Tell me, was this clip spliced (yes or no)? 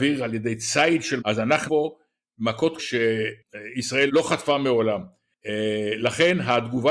yes